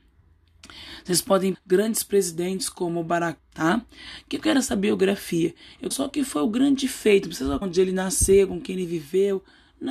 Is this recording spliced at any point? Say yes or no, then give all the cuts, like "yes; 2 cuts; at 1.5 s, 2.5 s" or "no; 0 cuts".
yes; 4 cuts; at 1.5 s, 3.4 s, 5.9 s, 7.6 s